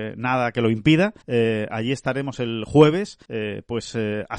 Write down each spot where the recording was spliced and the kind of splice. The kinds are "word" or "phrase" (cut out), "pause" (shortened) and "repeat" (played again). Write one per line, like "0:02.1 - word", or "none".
0:01.2 - pause
0:03.2 - pause